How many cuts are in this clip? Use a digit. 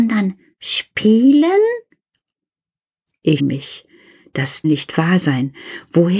2